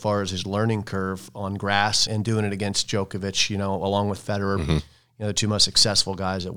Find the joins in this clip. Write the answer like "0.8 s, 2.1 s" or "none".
2.1 s